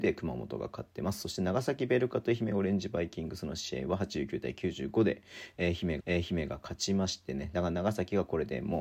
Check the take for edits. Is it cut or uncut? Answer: cut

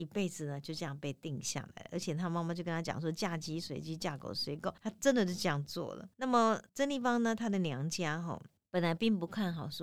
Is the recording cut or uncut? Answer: cut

